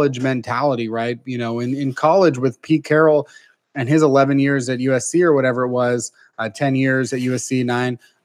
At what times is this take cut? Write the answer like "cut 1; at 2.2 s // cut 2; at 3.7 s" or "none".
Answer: none